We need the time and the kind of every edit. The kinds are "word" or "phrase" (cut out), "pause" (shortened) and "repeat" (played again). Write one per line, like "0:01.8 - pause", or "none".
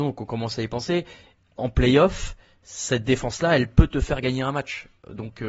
none